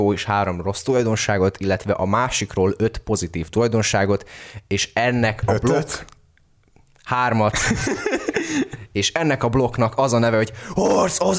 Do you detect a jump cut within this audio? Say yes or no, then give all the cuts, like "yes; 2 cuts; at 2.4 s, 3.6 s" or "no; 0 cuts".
no; 0 cuts